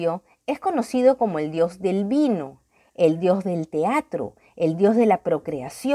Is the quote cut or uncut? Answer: uncut